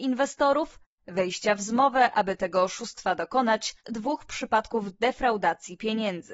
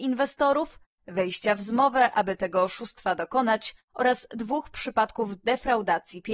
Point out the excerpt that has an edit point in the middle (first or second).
first